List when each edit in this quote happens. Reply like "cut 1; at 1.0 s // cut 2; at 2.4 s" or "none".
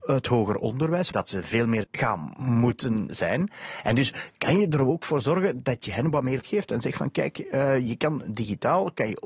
cut 1; at 1.1 s // cut 2; at 1.8 s // cut 3; at 3.1 s // cut 4; at 6.4 s

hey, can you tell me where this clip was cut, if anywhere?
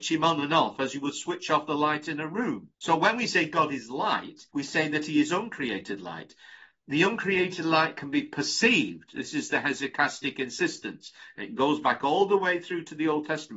cut 1; at 2.7 s // cut 2; at 4.5 s

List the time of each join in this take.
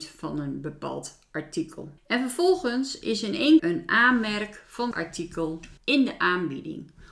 cut 1; at 2.0 s // cut 2; at 3.6 s // cut 3; at 4.9 s // cut 4; at 5.8 s

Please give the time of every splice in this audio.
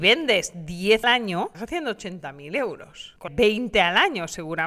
cut 1; at 1.0 s // cut 2; at 1.5 s // cut 3; at 3.3 s

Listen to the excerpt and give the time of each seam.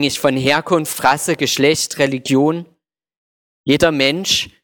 none

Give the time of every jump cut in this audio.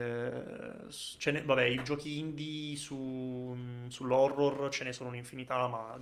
none

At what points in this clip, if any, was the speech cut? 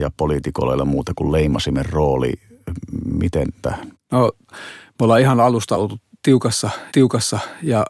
cut 1; at 3.6 s // cut 2; at 5.7 s // cut 3; at 6.9 s

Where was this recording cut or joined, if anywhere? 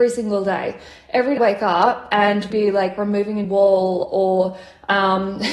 cut 1; at 1.4 s // cut 2; at 2.5 s // cut 3; at 3.4 s

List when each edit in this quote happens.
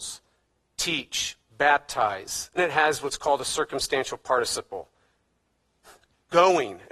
cut 1; at 2.6 s

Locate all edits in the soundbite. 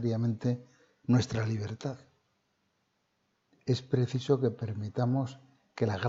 none

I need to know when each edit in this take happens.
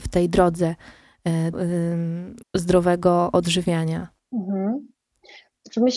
cut 1; at 1.5 s // cut 2; at 2.4 s // cut 3; at 4.2 s

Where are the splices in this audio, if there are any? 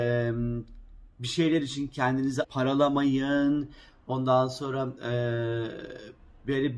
cut 1; at 1.1 s // cut 2; at 2.4 s

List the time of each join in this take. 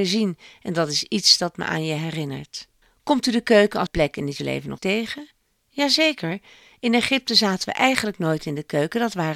cut 1; at 2.8 s // cut 2; at 3.9 s // cut 3; at 4.4 s // cut 4; at 4.8 s

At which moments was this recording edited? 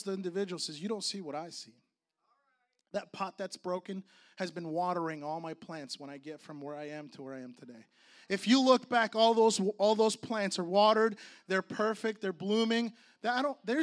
none

